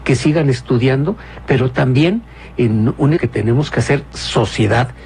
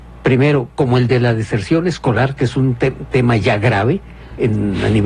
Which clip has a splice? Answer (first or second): first